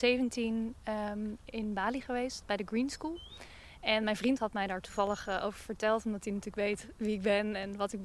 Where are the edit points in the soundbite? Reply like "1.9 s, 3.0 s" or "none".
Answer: none